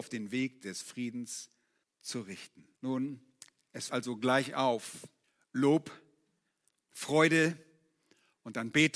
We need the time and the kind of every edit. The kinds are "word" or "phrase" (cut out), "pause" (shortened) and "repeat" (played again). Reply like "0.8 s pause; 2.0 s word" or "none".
1.8 s pause; 2.7 s pause; 3.9 s word; 5.2 s pause